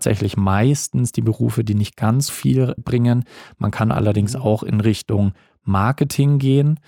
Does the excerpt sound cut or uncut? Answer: cut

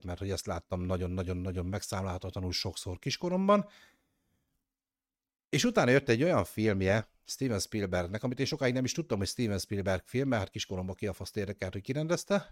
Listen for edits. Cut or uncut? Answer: uncut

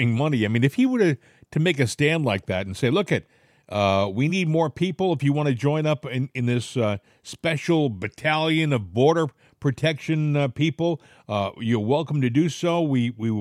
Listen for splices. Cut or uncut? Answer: uncut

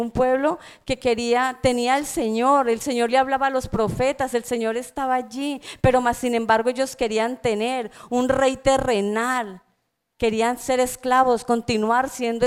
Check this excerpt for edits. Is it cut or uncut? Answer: uncut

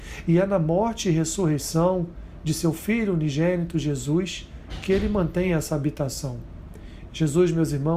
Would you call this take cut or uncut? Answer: uncut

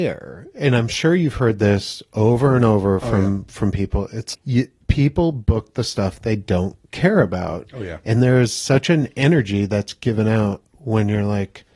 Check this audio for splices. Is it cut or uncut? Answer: cut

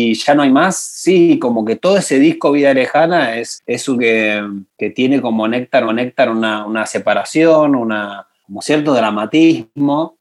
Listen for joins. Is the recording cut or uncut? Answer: cut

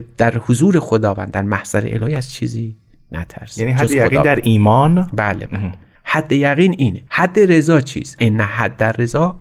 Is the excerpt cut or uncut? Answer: cut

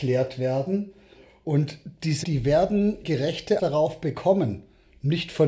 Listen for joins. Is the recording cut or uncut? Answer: cut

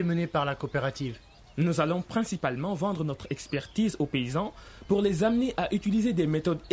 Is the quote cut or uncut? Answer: uncut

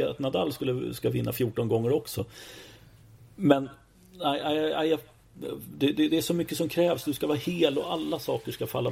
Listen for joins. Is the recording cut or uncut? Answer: uncut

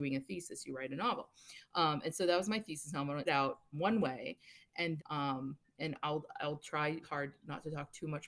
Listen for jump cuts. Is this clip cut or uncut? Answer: cut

